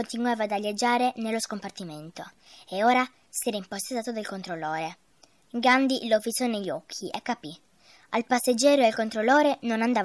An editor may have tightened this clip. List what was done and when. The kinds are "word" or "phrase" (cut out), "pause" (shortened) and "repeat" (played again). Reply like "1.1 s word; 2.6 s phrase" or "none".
none